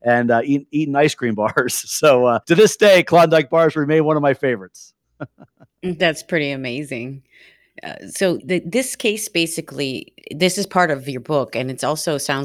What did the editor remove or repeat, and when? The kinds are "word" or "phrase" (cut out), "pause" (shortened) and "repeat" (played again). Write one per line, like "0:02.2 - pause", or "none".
0:02.4 - pause
0:08.4 - word
0:10.2 - pause